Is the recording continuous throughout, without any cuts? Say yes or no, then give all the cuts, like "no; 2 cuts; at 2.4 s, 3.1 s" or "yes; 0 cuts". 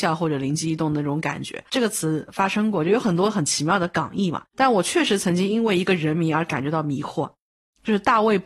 yes; 0 cuts